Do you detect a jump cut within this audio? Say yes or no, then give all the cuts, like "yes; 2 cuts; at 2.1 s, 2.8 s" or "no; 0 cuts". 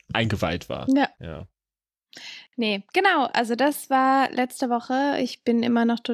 yes; 1 cut; at 1.1 s